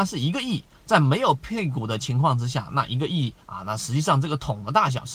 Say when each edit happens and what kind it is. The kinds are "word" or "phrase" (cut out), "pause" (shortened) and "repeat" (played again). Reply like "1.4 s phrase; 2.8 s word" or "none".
3.4 s pause